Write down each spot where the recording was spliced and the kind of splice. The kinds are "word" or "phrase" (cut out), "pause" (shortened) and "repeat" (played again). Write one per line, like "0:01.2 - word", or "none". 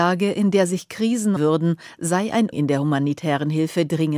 0:01.4 - phrase
0:02.5 - word